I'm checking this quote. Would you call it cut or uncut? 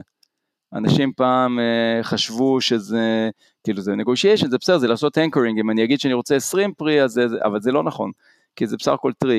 uncut